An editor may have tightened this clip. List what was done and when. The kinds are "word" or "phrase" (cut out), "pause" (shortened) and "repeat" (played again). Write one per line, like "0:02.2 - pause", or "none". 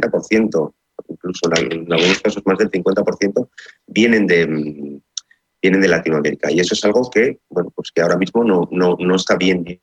none